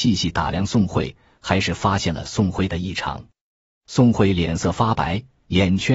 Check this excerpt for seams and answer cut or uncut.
uncut